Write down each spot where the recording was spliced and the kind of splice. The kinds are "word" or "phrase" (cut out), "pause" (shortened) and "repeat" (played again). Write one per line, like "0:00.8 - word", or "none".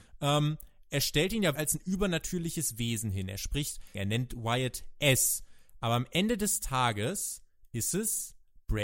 0:01.5 - word
0:03.9 - phrase